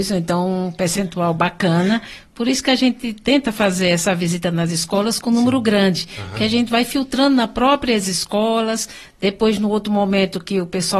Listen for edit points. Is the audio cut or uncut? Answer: uncut